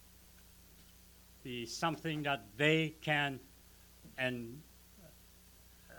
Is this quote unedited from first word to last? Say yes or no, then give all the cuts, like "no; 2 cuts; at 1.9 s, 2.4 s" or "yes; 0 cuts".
yes; 0 cuts